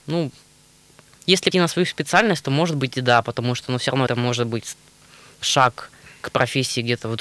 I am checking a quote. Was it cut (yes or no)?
yes